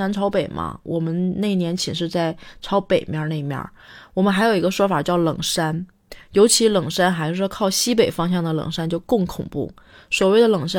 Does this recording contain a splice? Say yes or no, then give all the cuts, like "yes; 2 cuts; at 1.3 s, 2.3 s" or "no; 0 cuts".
no; 0 cuts